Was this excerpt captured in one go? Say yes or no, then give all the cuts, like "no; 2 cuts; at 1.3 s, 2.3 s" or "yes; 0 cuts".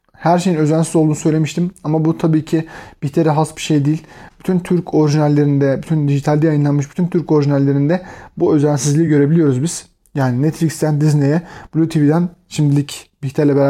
yes; 0 cuts